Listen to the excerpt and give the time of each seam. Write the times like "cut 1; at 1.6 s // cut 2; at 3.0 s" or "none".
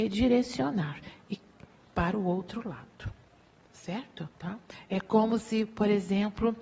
cut 1; at 4.3 s